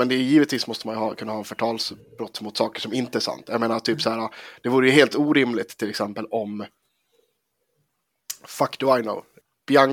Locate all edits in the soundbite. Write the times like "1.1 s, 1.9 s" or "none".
none